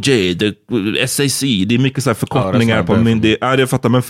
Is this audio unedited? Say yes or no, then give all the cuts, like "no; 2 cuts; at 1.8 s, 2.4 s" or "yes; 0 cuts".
yes; 0 cuts